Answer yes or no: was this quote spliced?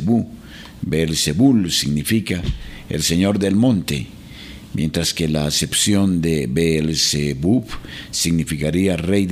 no